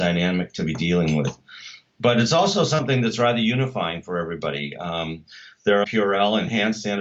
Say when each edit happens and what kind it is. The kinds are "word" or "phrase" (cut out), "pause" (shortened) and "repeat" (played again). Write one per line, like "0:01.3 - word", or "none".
0:05.8 - phrase